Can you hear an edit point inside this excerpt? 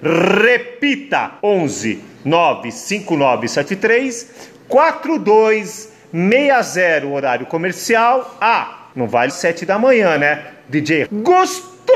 yes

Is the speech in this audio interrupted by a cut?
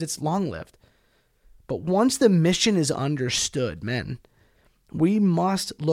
no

